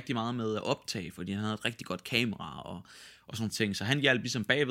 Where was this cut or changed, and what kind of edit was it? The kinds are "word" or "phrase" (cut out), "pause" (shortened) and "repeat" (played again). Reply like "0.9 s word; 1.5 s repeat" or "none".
3.5 s word